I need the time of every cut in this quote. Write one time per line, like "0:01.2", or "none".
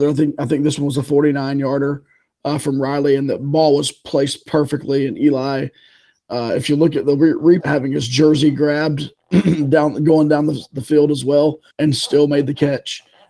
0:07.6
0:11.7